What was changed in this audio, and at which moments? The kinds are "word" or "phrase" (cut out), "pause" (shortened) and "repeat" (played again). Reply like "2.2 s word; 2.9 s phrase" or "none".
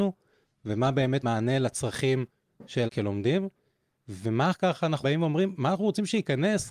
1.2 s word; 2.9 s word; 4.5 s word; 5.0 s word